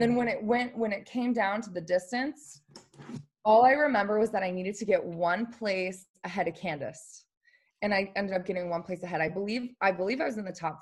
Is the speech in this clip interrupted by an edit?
no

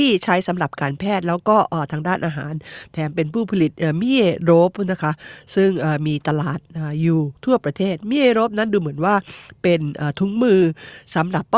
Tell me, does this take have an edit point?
yes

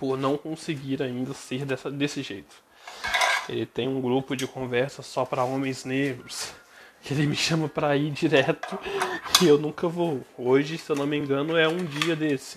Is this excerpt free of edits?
yes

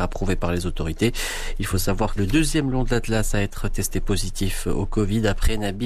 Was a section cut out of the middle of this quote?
yes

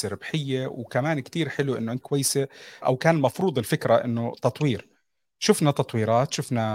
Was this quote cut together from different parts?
yes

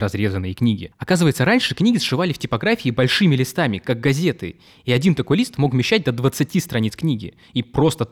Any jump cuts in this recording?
no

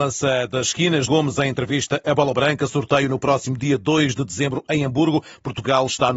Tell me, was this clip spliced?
yes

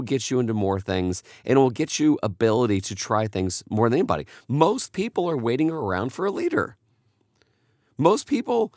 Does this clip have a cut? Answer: no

